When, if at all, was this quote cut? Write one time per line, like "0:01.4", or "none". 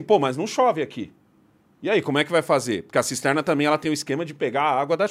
none